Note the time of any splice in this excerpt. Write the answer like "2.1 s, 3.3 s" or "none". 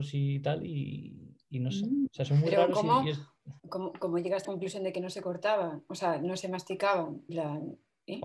3.6 s, 4.4 s, 7.3 s